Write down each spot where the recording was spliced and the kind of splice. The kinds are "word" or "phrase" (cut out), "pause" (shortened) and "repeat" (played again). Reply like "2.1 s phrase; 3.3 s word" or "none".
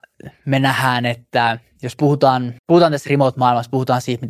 2.6 s pause